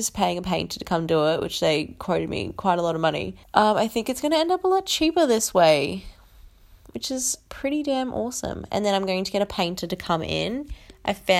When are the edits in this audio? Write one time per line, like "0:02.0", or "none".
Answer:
0:03.4